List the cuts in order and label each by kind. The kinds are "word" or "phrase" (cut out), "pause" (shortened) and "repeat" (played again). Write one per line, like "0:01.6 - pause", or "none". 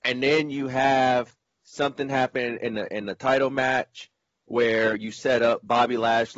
none